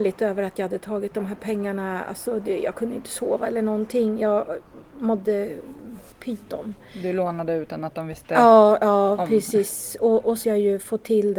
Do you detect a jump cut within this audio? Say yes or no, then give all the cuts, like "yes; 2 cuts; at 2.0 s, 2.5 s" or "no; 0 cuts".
yes; 2 cuts; at 6.1 s, 10.4 s